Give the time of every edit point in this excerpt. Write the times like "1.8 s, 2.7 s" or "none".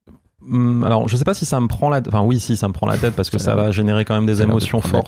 none